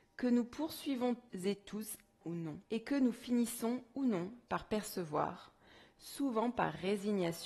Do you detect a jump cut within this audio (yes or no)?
yes